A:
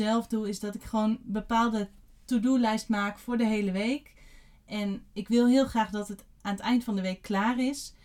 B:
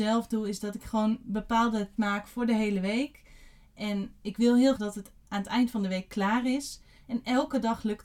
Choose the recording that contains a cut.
B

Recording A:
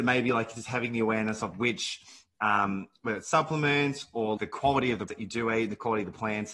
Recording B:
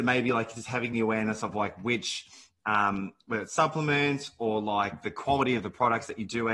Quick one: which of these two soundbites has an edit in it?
A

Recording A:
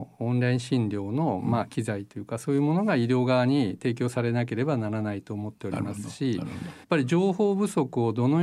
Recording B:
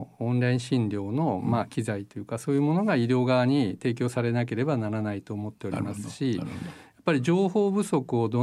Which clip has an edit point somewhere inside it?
A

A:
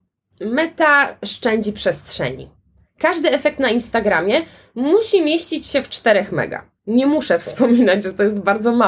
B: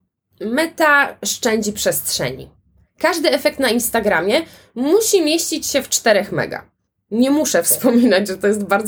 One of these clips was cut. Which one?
A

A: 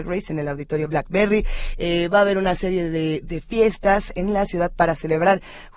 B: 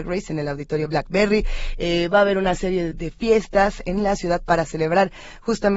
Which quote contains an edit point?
B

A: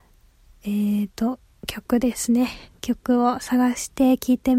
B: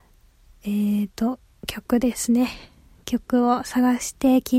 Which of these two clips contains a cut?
A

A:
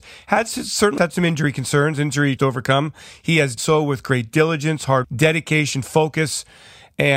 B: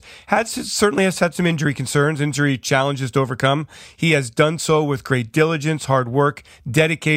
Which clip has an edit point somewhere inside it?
A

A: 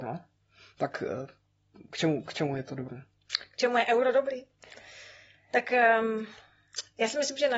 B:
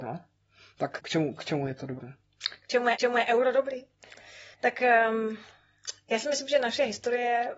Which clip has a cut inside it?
B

